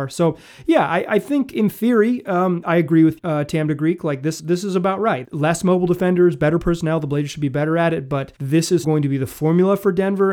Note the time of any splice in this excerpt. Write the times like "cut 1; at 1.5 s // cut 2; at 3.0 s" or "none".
cut 1; at 2.6 s // cut 2; at 3.2 s // cut 3; at 4.4 s // cut 4; at 5.2 s // cut 5; at 8.4 s // cut 6; at 8.8 s